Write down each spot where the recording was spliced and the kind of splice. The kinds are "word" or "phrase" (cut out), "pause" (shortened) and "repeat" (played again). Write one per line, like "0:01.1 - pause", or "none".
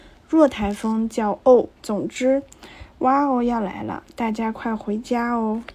0:01.7 - pause